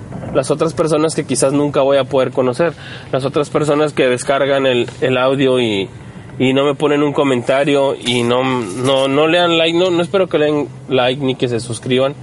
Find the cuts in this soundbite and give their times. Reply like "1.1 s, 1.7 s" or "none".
none